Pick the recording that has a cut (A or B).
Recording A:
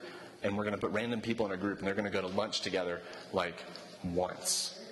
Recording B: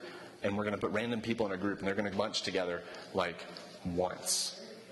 B